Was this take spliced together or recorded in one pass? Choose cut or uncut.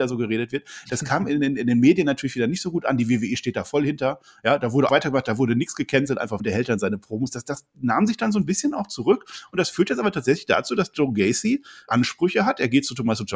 cut